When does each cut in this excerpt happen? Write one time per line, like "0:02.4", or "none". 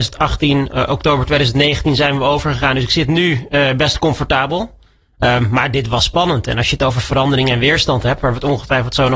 none